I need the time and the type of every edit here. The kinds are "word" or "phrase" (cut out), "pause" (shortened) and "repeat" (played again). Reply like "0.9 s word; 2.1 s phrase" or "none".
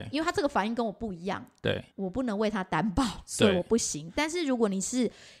1.9 s pause